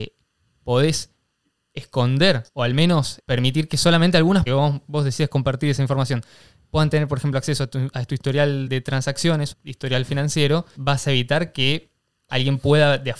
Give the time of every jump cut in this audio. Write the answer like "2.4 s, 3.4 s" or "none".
2.5 s, 3.2 s, 4.5 s, 8.7 s, 9.5 s, 10.8 s